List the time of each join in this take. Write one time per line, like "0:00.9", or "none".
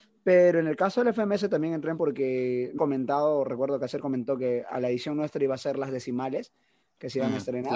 0:02.0
0:02.8